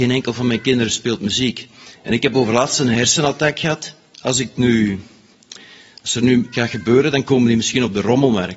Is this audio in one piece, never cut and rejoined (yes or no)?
no